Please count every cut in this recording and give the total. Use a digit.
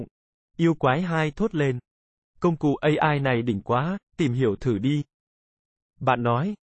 0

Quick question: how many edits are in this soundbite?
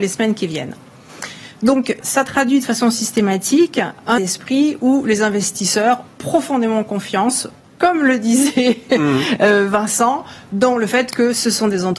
4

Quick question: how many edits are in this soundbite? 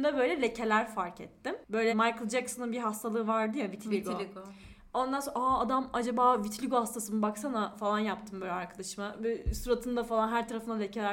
1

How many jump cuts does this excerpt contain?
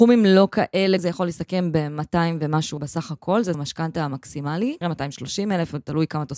4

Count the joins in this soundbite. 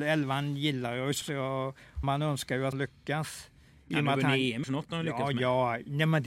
4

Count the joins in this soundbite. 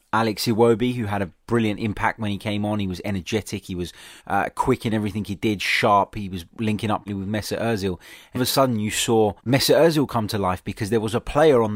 6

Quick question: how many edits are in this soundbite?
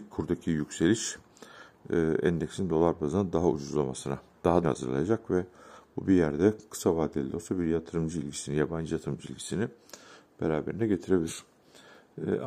1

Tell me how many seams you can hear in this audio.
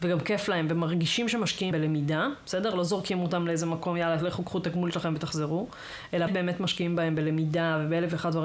3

